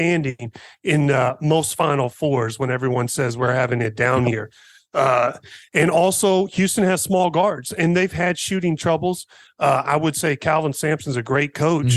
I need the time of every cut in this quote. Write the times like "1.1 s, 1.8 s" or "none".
none

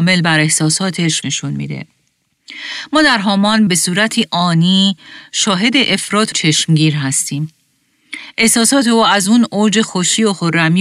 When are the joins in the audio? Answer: 1.2 s, 3.7 s, 6.3 s

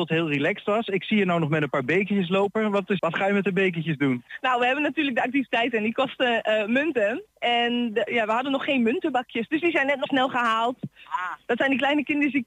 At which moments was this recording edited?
3.0 s, 8.1 s, 10.1 s

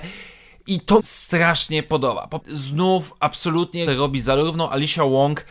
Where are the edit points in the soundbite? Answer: 1.0 s, 2.4 s, 3.9 s

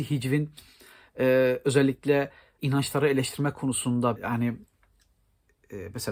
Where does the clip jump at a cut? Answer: 2.6 s, 4.2 s

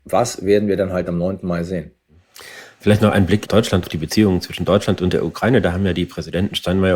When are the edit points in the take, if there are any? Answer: 3.5 s, 3.8 s

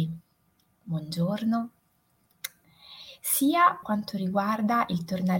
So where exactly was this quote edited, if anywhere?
3.8 s

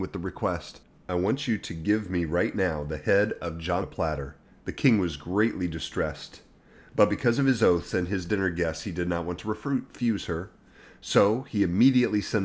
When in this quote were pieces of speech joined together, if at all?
3.8 s, 4.4 s

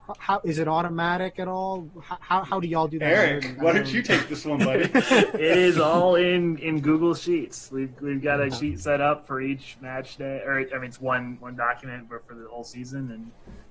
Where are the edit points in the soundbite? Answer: 8.5 s

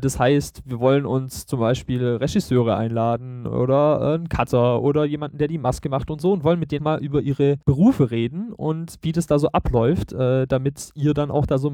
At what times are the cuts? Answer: 6.8 s, 7.6 s

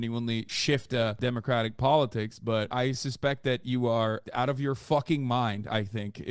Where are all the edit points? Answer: none

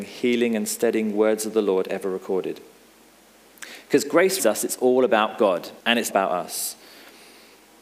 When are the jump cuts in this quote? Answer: 4.4 s, 5.8 s, 6.1 s

